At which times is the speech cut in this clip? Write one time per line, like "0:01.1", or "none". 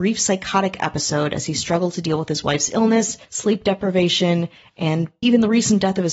0:03.2
0:05.2